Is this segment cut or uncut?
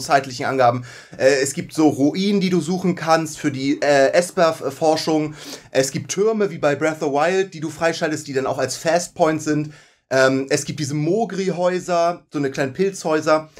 uncut